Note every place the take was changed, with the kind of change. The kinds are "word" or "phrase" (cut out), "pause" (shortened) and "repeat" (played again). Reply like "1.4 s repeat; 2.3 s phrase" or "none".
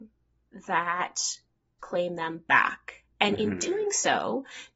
1.8 s word